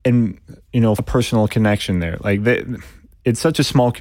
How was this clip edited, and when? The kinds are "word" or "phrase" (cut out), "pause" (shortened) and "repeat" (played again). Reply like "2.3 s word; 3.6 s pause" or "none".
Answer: 1.0 s word